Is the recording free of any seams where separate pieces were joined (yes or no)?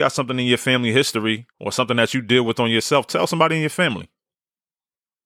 no